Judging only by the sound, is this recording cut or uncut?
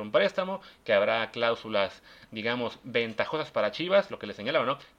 uncut